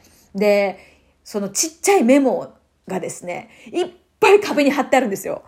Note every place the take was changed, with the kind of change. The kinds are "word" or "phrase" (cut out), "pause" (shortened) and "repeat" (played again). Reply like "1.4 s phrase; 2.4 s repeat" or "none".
none